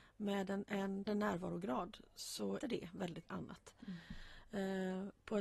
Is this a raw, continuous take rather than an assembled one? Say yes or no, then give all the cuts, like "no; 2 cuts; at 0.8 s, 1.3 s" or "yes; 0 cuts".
no; 3 cuts; at 1.1 s, 2.6 s, 3.2 s